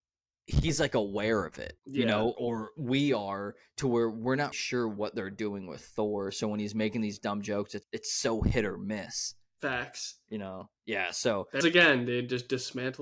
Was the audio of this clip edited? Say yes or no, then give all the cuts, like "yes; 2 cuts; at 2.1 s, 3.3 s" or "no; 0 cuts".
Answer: yes; 5 cuts; at 1.8 s, 2.3 s, 4.5 s, 7.8 s, 11.6 s